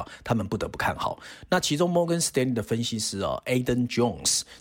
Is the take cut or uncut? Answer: uncut